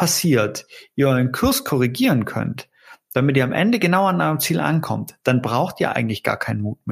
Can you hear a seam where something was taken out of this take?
no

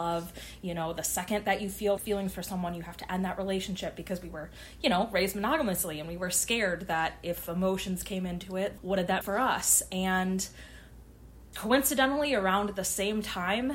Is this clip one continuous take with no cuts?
no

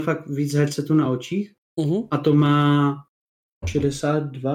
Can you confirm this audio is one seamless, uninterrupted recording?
yes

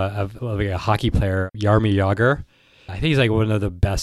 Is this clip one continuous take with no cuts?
yes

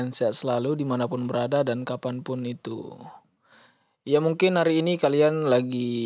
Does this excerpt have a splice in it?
no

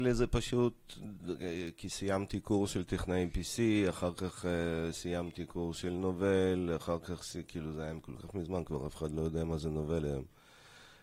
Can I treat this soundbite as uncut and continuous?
yes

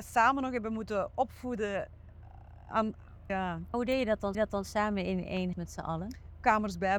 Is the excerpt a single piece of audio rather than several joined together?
no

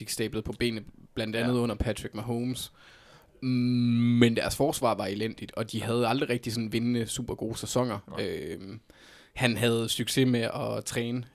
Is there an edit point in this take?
no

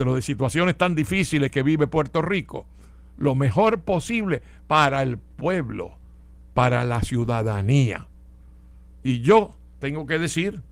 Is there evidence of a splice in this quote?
no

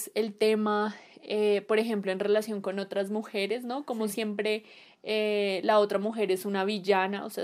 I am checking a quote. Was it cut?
no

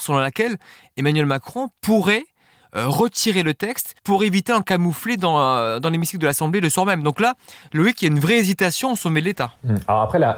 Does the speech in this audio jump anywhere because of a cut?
yes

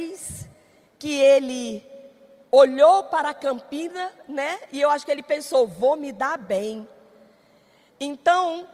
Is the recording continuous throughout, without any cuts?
yes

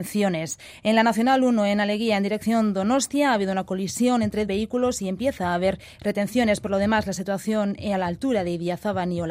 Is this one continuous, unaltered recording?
no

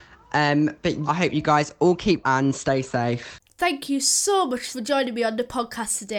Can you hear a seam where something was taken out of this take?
yes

